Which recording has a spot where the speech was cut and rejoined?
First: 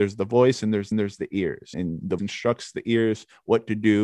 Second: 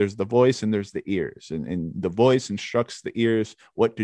first; 3 cuts; at 0.9 s, 1.7 s, 2.2 s

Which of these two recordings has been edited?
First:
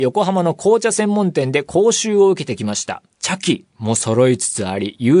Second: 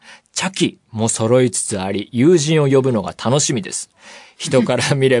first; 1 cut; at 3.1 s

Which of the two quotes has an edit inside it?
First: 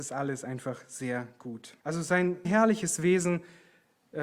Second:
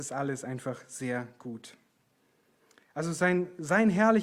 first; 2 cuts; at 1.8 s, 2.4 s

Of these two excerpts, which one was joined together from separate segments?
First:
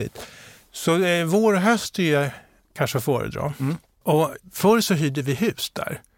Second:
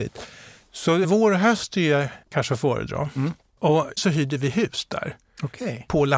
second; 3 cuts; at 1.0 s, 2.2 s, 4.0 s

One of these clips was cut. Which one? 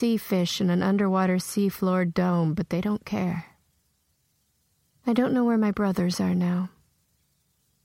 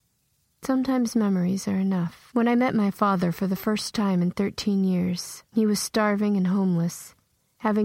second; 2 cuts; at 2.3 s, 5.5 s

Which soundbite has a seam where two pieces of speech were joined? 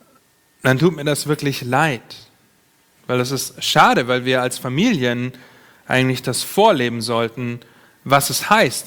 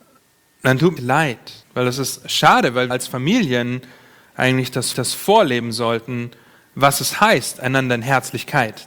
second; 4 cuts; at 1.0 s, 1.6 s, 2.9 s, 4.9 s

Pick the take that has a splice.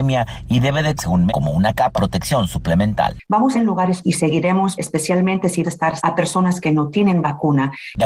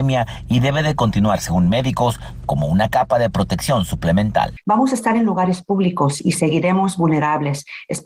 first; 8 cuts; at 1.0 s, 1.3 s, 1.9 s, 3.5 s, 4.0 s, 4.7 s, 5.6 s, 6.0 s

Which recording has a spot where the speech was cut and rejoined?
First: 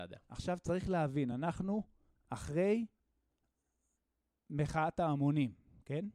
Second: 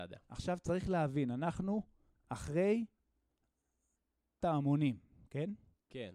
second; 1 cut; at 4.4 s

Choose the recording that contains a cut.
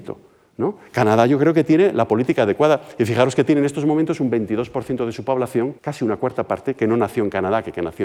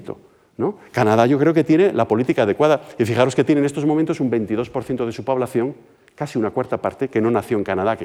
first; 1 cut; at 5.8 s

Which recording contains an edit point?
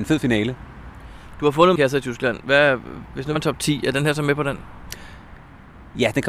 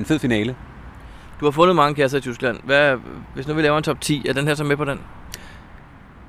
first; 2 cuts; at 1.8 s, 3.4 s

